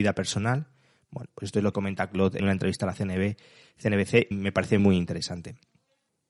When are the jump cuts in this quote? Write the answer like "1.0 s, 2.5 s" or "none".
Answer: 1.7 s, 2.4 s, 4.3 s, 4.8 s